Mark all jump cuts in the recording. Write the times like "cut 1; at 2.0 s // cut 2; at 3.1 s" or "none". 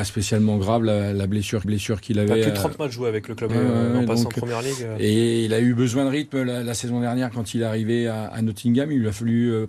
cut 1; at 1.6 s // cut 2; at 3.5 s